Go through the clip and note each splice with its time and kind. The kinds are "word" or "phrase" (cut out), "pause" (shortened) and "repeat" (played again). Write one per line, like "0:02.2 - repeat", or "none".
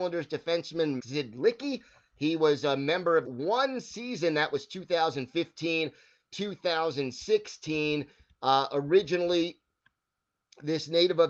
0:01.0 - word
0:03.2 - phrase

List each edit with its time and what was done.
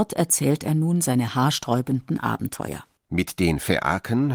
0:03.0 - pause

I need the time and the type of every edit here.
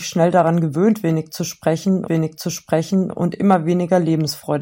0:02.1 - repeat

